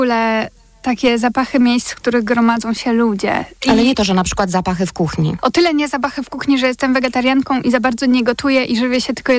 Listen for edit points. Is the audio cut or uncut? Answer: uncut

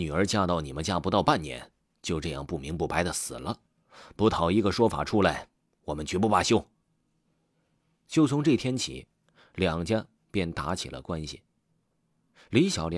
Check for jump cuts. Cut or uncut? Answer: uncut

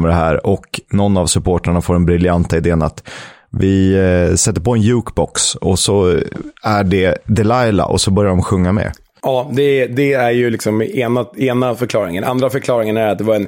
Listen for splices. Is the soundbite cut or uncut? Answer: uncut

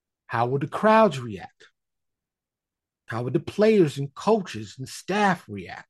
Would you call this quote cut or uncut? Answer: uncut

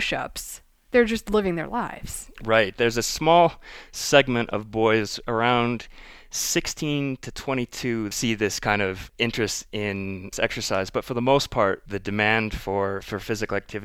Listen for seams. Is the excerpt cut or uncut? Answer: cut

